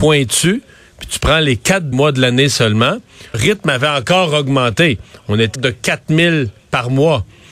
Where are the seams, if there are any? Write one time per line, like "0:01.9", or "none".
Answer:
0:01.9
0:03.3
0:05.6
0:06.6